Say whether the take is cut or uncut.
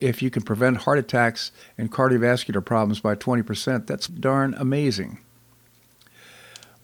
cut